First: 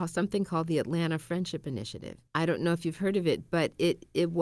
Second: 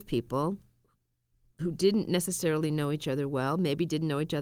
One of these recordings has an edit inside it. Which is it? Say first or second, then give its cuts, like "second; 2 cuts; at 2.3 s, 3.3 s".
first; 1 cut; at 2.3 s